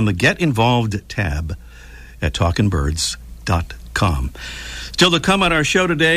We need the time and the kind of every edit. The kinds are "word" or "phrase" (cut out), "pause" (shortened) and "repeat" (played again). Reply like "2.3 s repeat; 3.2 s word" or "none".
none